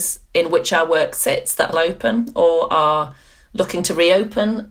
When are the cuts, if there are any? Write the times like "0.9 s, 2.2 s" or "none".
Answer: 1.7 s